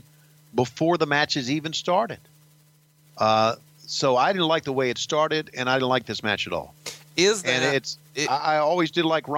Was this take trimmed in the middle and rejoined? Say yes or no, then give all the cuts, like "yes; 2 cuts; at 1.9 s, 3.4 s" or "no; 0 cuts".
no; 0 cuts